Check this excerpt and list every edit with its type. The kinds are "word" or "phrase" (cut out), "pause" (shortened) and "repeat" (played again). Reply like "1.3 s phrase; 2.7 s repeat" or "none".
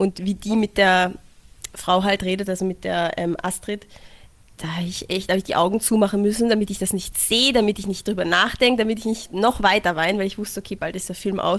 none